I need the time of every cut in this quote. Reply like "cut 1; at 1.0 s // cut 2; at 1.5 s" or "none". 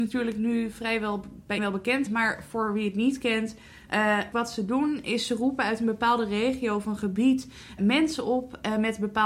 cut 1; at 1.6 s // cut 2; at 2.1 s // cut 3; at 4.3 s // cut 4; at 7.8 s